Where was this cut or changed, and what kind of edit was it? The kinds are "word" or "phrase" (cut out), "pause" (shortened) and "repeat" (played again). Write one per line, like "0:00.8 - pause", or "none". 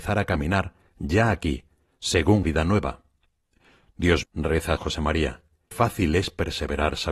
0:02.4 - word
0:04.2 - word
0:04.8 - word
0:05.7 - word